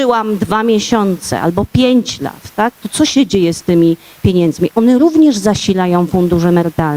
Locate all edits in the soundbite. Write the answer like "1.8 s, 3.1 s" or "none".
none